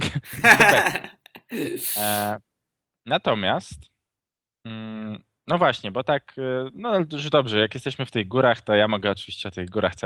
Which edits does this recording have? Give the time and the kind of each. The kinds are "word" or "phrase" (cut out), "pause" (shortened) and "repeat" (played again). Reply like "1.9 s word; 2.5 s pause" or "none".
none

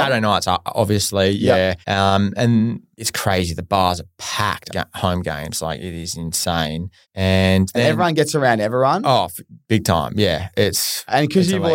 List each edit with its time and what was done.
1.8 s pause; 2.9 s word; 4.7 s word; 7.0 s pause

